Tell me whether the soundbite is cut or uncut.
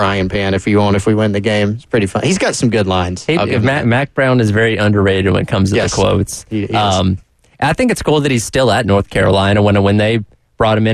uncut